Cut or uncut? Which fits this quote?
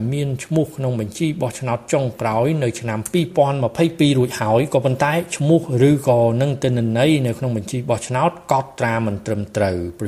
uncut